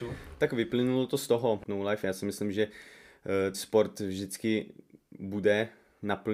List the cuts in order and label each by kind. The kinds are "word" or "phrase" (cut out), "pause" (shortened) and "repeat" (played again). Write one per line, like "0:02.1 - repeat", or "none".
0:01.7 - phrase
0:03.5 - word